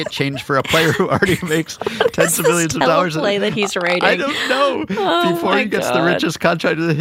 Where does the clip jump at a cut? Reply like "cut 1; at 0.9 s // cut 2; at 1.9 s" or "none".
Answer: none